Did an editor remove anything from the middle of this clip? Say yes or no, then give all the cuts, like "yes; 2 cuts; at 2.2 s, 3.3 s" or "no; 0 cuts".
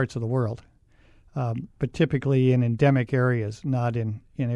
no; 0 cuts